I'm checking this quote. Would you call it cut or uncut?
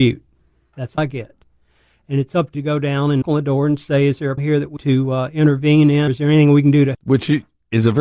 cut